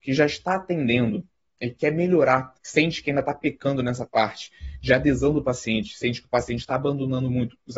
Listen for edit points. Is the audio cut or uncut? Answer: cut